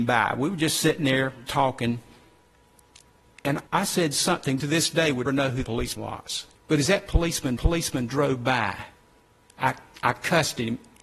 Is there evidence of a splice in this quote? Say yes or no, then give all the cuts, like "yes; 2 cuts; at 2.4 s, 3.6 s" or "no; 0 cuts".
yes; 8 cuts; at 1.5 s, 3.7 s, 4.6 s, 5.3 s, 5.6 s, 6.0 s, 6.5 s, 7.6 s